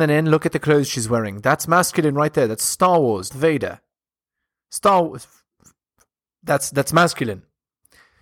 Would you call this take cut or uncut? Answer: cut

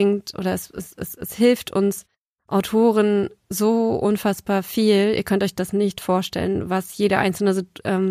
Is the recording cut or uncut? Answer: uncut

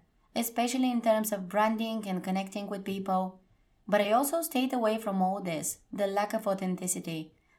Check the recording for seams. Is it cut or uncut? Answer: uncut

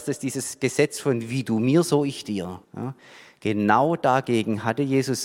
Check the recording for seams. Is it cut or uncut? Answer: cut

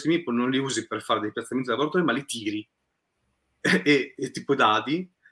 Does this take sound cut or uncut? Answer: uncut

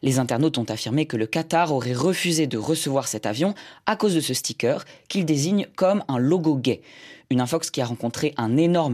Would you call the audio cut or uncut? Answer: uncut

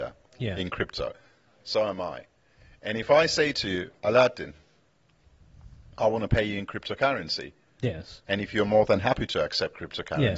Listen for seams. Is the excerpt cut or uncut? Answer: uncut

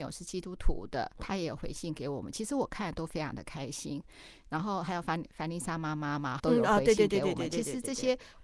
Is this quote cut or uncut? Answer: cut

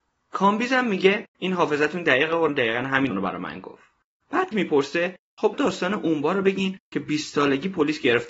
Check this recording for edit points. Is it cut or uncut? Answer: cut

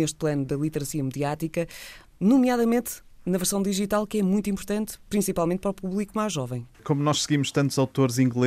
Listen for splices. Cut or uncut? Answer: cut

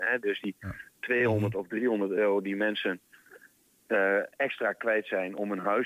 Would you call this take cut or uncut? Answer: uncut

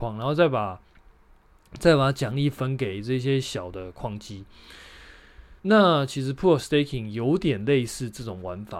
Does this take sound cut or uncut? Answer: cut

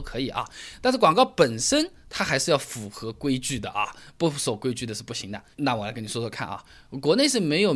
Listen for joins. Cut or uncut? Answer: cut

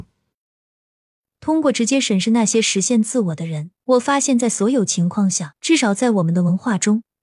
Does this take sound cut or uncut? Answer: cut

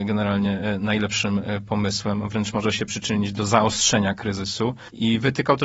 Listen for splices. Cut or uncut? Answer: uncut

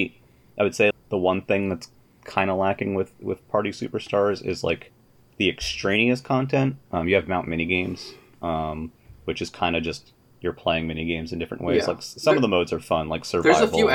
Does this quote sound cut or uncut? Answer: cut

